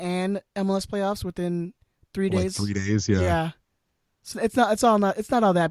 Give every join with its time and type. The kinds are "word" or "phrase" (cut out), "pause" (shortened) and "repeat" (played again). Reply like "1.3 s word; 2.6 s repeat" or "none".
4.3 s word